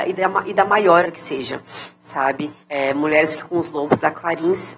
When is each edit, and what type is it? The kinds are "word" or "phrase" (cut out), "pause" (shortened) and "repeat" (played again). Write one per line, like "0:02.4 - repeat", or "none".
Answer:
0:01.0 - word
0:02.6 - pause
0:03.4 - word